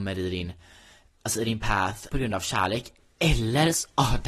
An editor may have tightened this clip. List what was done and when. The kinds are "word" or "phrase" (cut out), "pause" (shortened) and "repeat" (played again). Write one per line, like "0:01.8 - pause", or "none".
0:02.1 - word